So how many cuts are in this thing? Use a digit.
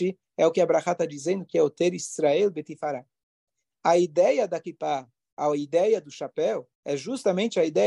1